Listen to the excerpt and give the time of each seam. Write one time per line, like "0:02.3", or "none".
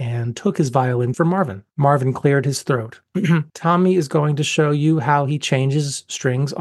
0:01.1
0:01.7
0:03.5